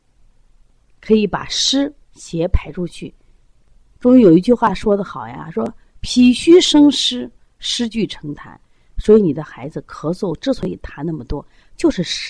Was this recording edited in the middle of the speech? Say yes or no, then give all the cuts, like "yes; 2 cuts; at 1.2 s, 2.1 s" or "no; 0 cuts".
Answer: no; 0 cuts